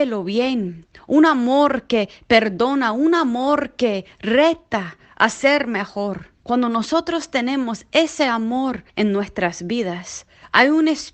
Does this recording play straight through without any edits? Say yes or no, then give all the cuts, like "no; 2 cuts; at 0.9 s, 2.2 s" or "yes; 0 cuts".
no; 2 cuts; at 6.4 s, 8.9 s